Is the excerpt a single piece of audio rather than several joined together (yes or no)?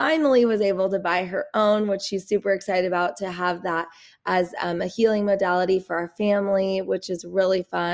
yes